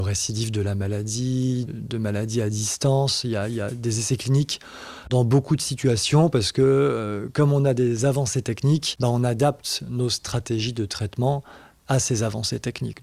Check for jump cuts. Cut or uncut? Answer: cut